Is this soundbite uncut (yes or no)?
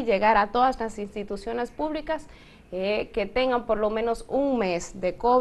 yes